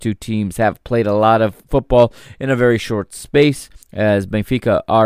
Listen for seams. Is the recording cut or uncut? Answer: cut